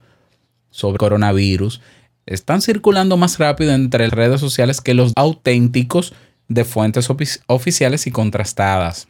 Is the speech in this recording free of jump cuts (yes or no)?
no